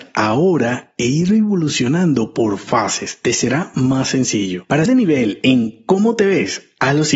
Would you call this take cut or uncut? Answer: cut